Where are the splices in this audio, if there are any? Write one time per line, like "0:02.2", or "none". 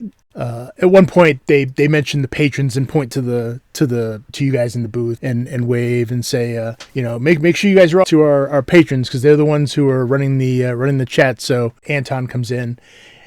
0:01.4
0:04.3
0:05.2
0:06.9
0:08.0
0:11.8